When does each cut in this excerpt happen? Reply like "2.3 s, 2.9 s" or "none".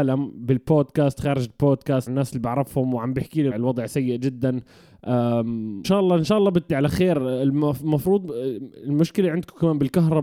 2.1 s, 3.5 s, 5.8 s, 6.7 s